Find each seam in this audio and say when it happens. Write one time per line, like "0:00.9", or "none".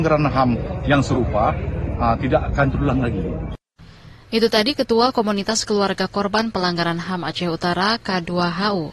none